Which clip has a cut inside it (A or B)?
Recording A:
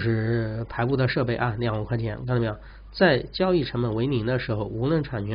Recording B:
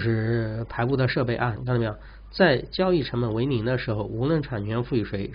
B